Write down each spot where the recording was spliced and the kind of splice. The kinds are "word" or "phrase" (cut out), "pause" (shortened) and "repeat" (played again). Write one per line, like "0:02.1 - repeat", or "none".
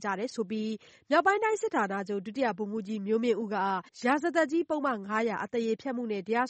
0:03.9 - pause

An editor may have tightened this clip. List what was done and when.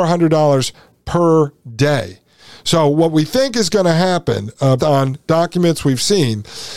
0:04.8 - word

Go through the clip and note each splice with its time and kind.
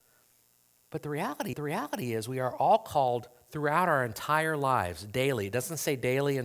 0:01.5 - repeat

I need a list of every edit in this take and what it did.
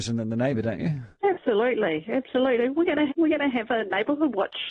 0:01.1 - pause
0:03.1 - word

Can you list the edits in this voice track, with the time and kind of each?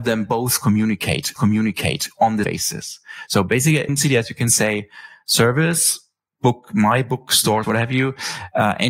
0:01.4 - repeat
0:02.4 - word
0:03.9 - word
0:06.3 - pause
0:07.6 - word

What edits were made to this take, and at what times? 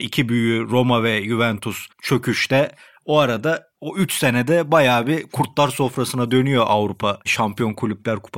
0:01.9 - pause
0:07.2 - pause

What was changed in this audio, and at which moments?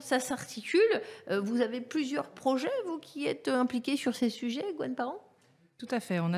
none

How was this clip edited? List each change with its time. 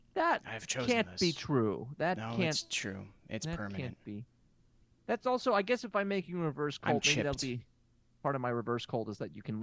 none

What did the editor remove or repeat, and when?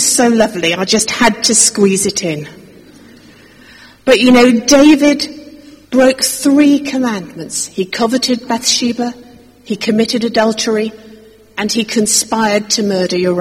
0:05.8 - pause

